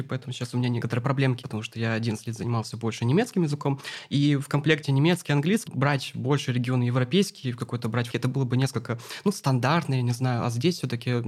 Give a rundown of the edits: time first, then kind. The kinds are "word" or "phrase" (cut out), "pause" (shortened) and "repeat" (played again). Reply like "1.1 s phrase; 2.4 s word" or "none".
1.4 s word; 5.7 s word; 8.1 s word